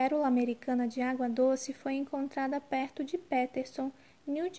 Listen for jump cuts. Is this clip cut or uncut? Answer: uncut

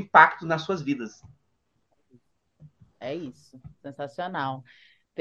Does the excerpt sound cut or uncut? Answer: uncut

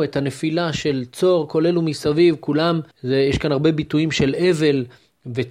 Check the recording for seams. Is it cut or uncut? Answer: cut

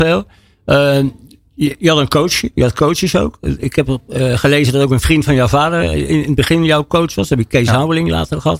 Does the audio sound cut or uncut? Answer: uncut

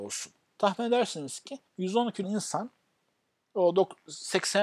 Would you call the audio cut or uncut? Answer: cut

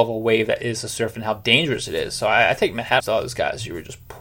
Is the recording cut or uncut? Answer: cut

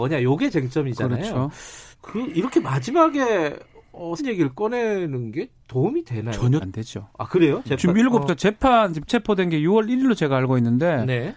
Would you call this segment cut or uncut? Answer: cut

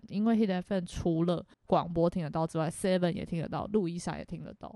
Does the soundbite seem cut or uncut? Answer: cut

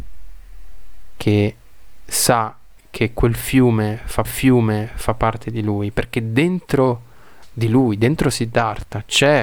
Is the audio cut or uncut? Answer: cut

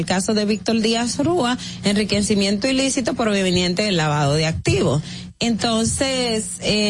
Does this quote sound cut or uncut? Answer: uncut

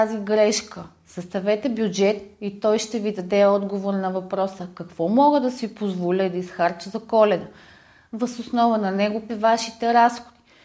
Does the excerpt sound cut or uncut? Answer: cut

